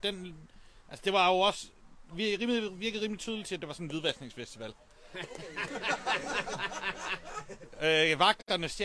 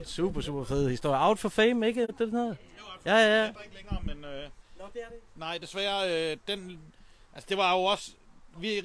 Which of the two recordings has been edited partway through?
second; 1 cut; at 3.5 s

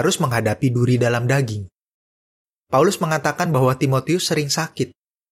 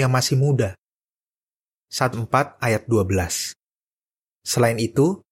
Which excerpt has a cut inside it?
second; 1 cut; at 2.1 s

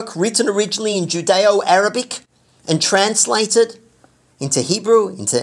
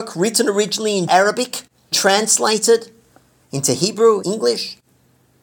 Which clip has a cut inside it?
second; 3 cuts; at 1.1 s, 1.9 s, 4.2 s

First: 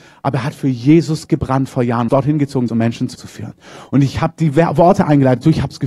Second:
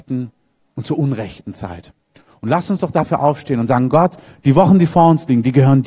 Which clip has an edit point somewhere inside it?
first; 3 cuts; at 2.1 s, 2.7 s, 3.2 s

